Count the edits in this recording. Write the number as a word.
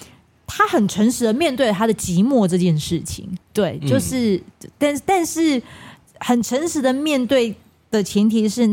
two